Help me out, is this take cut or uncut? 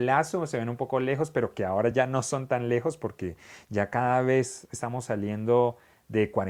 uncut